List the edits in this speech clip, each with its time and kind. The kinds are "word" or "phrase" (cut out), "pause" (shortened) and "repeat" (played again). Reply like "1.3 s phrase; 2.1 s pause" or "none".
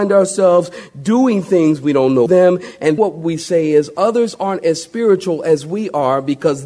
2.3 s phrase; 3.0 s word